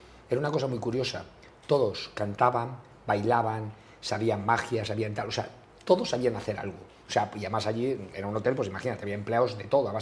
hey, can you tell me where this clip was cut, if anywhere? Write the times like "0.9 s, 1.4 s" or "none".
none

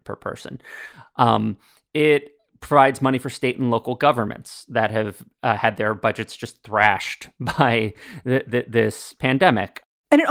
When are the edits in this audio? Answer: none

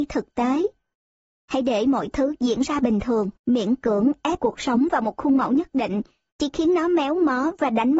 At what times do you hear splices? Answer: 3.4 s, 4.4 s

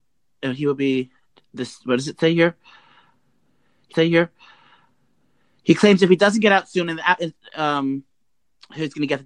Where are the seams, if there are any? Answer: 3.9 s

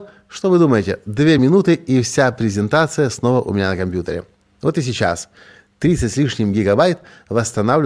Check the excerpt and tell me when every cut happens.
none

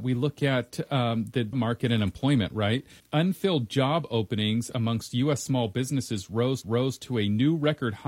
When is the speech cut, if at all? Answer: 1.5 s, 3.0 s, 6.6 s

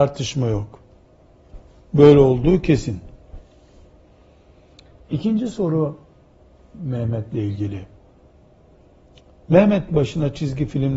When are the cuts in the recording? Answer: 9.9 s

